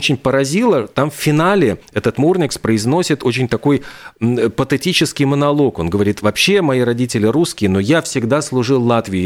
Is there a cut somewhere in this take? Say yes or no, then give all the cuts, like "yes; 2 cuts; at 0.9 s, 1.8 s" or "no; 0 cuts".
no; 0 cuts